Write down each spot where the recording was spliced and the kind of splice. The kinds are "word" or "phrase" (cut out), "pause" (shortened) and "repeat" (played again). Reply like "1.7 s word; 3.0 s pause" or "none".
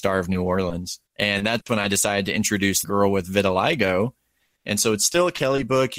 1.1 s pause; 2.8 s word